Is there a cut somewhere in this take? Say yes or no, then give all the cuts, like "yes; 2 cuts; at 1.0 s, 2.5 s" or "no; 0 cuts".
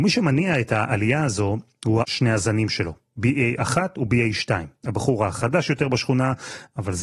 yes; 1 cut; at 2.0 s